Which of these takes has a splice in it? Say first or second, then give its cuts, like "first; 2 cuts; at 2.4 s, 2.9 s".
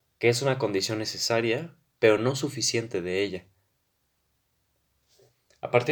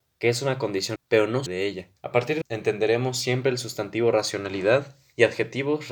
second; 4 cuts; at 1.0 s, 1.5 s, 2.0 s, 2.4 s